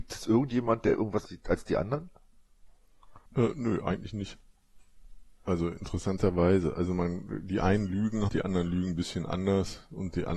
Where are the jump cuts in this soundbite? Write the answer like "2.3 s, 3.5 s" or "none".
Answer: 1.3 s, 3.3 s, 5.3 s, 8.3 s

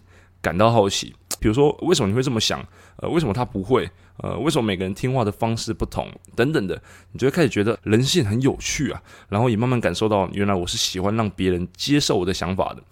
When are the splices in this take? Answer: 1.4 s, 1.8 s, 7.7 s

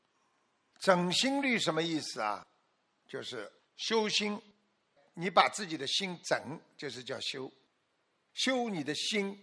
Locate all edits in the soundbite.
3.6 s

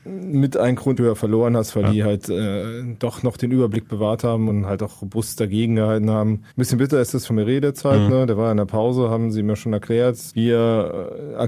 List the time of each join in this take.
1.0 s, 4.5 s, 6.5 s, 7.3 s, 10.3 s

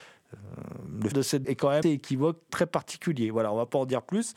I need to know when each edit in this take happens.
1.1 s, 1.4 s, 1.8 s, 2.5 s

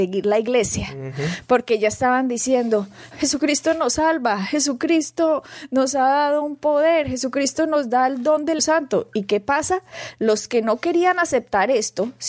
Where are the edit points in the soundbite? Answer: 3.1 s, 8.6 s

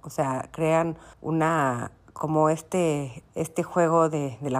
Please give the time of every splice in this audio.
1.1 s, 3.3 s

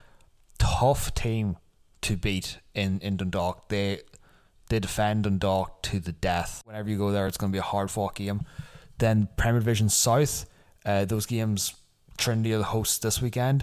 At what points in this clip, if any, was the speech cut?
none

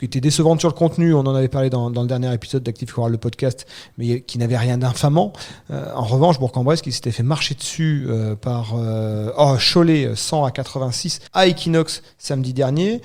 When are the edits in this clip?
11.3 s

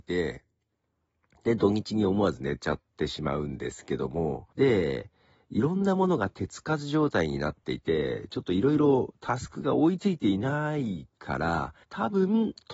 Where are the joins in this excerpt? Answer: 2.9 s, 4.5 s, 11.8 s

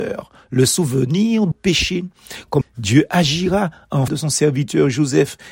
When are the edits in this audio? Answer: 1.5 s, 2.6 s, 4.1 s

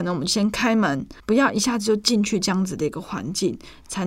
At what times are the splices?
1.2 s

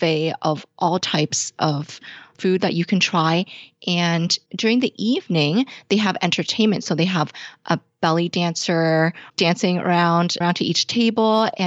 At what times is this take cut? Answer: 1.0 s, 4.5 s, 9.3 s, 10.4 s

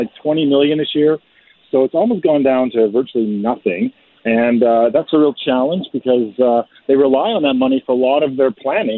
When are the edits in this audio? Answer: none

